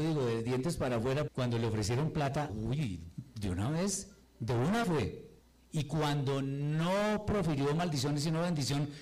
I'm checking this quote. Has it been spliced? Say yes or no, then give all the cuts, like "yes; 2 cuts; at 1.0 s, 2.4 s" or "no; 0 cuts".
yes; 5 cuts; at 1.3 s, 2.5 s, 4.2 s, 4.8 s, 5.4 s